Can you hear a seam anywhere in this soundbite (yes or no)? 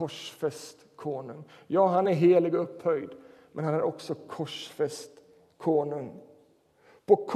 no